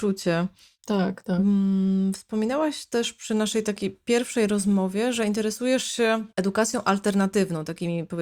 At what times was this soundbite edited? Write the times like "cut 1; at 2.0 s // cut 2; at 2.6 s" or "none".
cut 1; at 6.3 s